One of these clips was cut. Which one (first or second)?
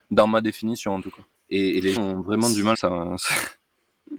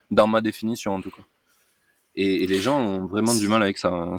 first